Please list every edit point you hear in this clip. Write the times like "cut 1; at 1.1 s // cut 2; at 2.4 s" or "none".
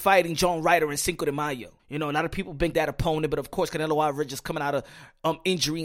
cut 1; at 1.8 s // cut 2; at 2.7 s